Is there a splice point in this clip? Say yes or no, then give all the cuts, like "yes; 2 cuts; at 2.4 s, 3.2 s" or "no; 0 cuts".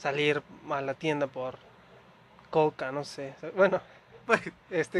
no; 0 cuts